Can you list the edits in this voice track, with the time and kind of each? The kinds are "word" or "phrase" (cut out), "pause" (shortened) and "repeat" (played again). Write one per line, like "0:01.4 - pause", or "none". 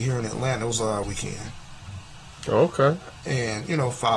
0:01.0 - word